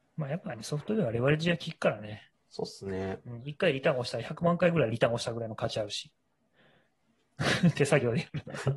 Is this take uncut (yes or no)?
no